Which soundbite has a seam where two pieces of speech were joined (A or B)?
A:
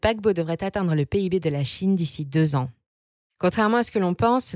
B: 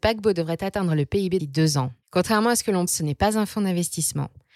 B